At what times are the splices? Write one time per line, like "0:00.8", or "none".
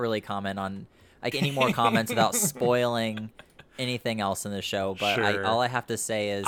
0:01.3

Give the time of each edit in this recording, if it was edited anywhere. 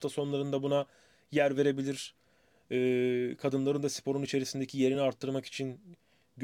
none

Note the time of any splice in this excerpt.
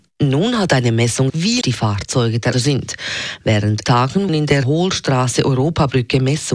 0:01.3
0:01.6
0:02.5
0:03.8
0:04.3
0:04.6

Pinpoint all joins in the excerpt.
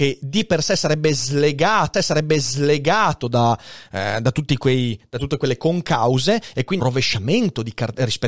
0:01.9
0:06.8

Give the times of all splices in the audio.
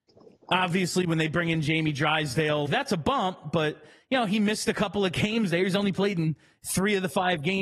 0:02.6

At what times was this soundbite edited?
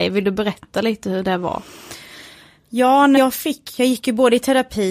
0:03.2
0:03.8

